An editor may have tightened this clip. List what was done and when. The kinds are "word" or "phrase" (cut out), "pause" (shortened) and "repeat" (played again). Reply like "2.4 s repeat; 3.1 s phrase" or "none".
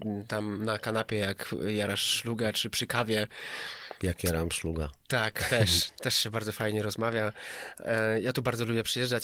none